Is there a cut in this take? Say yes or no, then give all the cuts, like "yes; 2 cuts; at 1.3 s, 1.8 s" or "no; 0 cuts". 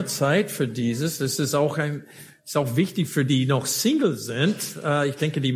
yes; 1 cut; at 3.3 s